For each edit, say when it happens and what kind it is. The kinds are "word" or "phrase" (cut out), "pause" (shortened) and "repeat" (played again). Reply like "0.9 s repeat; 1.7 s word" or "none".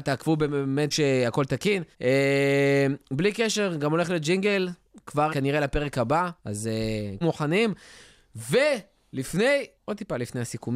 0.9 s word; 1.9 s pause; 5.3 s word; 6.4 s pause; 7.2 s phrase; 9.8 s pause